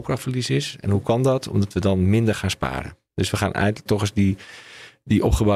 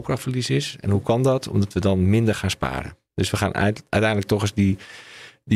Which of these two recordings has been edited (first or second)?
first